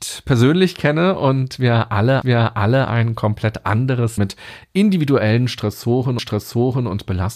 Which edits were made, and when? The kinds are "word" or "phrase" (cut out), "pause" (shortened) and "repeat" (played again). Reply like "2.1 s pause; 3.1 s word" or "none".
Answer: 2.2 s repeat; 4.2 s word; 6.2 s repeat